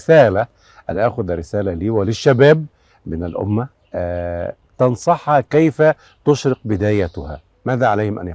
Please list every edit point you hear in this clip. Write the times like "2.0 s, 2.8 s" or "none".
none